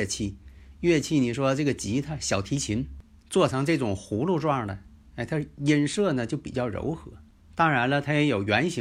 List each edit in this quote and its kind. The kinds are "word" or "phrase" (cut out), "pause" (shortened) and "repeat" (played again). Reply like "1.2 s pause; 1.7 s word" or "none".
none